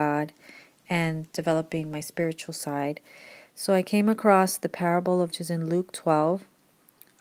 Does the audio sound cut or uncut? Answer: cut